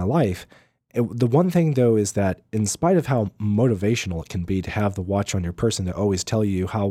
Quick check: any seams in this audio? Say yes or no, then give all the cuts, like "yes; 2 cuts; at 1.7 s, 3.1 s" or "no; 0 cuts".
no; 0 cuts